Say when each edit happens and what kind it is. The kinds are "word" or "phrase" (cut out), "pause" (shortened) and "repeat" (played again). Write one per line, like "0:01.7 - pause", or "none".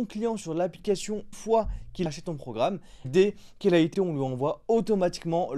0:01.3 - word
0:02.1 - word
0:03.0 - word
0:03.9 - word